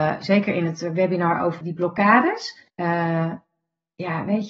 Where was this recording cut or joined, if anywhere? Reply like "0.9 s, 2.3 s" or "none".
1.6 s, 2.7 s